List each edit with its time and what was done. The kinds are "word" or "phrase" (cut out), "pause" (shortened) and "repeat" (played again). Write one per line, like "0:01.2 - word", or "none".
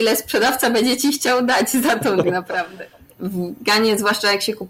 0:02.2 - phrase